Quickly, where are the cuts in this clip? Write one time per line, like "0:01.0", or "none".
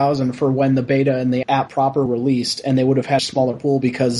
0:01.4
0:02.1
0:03.2